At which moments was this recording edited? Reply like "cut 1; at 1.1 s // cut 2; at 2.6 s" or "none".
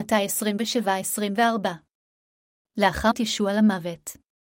cut 1; at 3.1 s